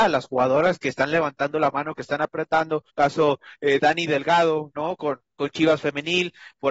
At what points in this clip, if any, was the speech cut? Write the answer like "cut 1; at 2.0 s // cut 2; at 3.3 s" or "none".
cut 1; at 2.0 s // cut 2; at 2.9 s // cut 3; at 5.3 s